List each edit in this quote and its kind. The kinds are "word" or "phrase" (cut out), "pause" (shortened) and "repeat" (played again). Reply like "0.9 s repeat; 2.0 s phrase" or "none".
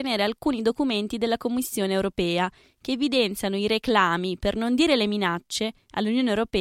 none